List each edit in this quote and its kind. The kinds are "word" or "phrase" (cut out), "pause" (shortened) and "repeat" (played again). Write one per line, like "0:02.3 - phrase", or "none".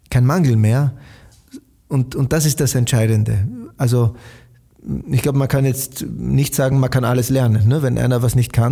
none